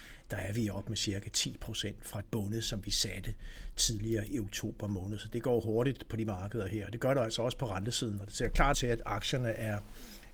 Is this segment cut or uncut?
cut